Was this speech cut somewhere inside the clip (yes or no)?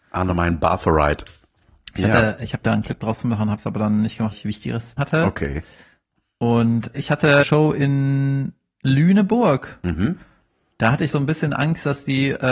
yes